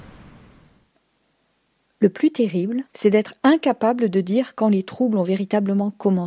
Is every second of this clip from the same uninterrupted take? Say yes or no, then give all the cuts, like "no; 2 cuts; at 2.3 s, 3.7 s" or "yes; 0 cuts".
no; 1 cut; at 2.9 s